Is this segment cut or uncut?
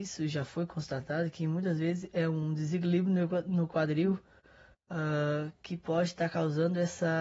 uncut